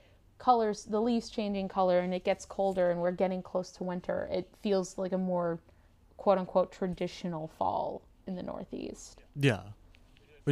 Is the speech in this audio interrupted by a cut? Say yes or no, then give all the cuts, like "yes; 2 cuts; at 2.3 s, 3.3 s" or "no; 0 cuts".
no; 0 cuts